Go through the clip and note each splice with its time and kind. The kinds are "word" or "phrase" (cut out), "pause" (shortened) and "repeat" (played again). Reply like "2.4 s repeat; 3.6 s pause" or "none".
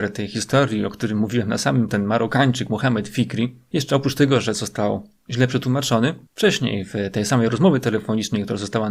1.9 s word; 6.3 s pause